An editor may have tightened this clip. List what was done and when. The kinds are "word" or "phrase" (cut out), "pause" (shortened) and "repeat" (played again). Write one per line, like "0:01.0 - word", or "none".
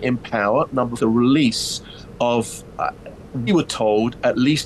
0:01.0 - phrase
0:03.5 - word